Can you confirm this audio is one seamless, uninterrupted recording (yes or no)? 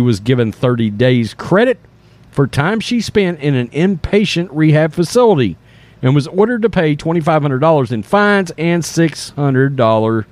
yes